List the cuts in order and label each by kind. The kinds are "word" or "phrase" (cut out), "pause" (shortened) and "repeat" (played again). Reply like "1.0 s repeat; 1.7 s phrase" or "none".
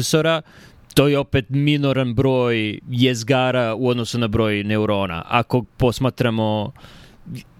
none